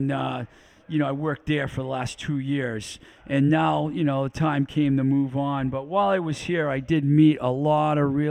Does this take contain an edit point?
no; 0 cuts

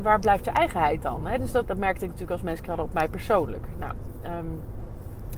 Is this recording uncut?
no; 2 cuts; at 1.6 s, 2.7 s

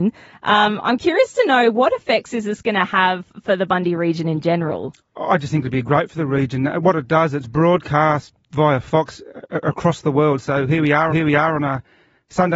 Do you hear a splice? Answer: yes; 1 cut; at 11.1 s

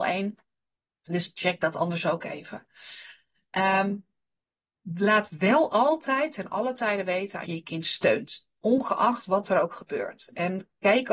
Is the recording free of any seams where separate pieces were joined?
no; 2 cuts; at 7.5 s, 8.6 s

